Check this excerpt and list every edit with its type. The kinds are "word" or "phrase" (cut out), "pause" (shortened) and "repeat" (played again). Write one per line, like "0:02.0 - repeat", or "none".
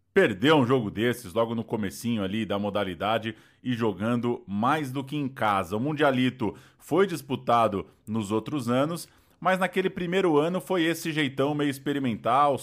none